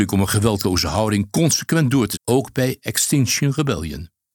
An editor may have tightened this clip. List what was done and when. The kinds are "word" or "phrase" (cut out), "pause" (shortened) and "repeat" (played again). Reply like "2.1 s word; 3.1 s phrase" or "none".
2.1 s word